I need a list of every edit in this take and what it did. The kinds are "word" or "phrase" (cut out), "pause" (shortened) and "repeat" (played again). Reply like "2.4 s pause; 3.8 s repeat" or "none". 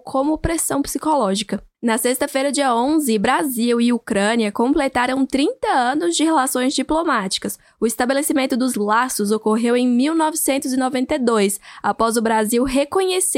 none